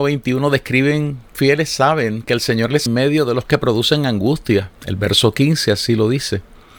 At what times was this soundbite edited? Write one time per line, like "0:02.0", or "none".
0:01.3
0:02.9
0:03.4
0:04.8